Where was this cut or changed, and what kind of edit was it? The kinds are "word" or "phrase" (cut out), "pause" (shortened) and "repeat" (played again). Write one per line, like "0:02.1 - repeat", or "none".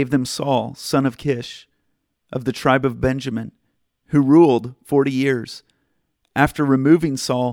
none